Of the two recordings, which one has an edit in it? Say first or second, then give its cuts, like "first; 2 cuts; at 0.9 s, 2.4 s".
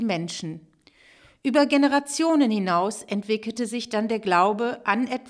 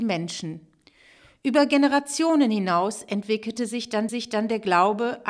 second; 1 cut; at 4.1 s